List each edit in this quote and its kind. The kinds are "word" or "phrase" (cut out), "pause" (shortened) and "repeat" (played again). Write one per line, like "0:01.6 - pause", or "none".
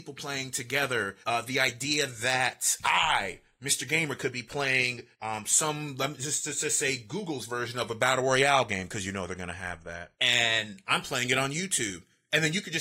0:01.2 - pause
0:05.1 - pause
0:10.1 - pause